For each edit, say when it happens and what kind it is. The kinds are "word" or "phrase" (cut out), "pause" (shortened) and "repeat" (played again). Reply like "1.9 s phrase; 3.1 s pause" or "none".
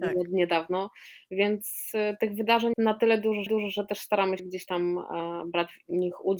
2.7 s word; 3.5 s repeat; 4.4 s word